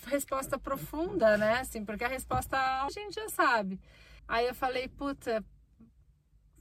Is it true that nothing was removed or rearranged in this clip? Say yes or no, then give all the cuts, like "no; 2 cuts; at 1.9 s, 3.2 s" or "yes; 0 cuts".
no; 2 cuts; at 2.9 s, 4.2 s